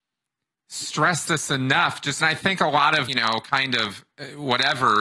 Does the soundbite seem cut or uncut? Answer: cut